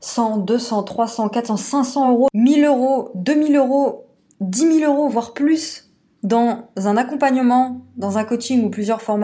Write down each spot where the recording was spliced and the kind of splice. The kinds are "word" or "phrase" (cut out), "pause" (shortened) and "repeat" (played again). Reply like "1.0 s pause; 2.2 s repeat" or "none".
none